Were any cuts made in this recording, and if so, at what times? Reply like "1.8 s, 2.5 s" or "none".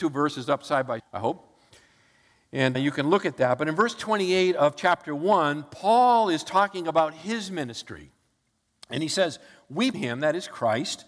1.0 s, 2.7 s, 9.9 s